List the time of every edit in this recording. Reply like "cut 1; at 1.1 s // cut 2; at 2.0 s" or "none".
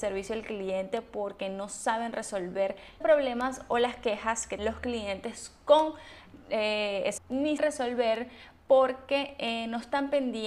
cut 1; at 3.0 s // cut 2; at 4.6 s // cut 3; at 7.2 s // cut 4; at 7.6 s